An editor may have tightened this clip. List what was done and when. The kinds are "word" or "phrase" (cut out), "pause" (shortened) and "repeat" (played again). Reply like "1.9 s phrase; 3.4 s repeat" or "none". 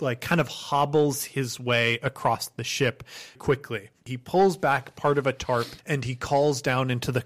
3.4 s word

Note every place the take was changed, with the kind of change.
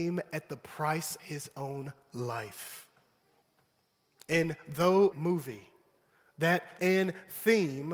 1.2 s word; 3.4 s pause; 5.1 s word; 6.8 s word

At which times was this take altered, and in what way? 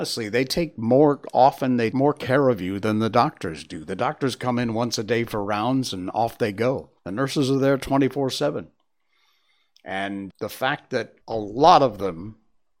1.9 s word; 7.0 s pause; 10.3 s word; 11.2 s pause

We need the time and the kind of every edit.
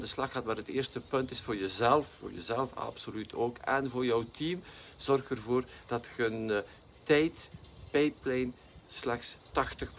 none

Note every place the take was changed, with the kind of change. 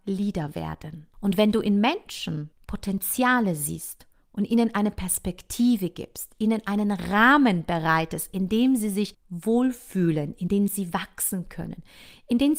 none

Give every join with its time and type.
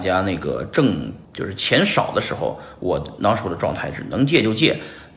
1.2 s pause

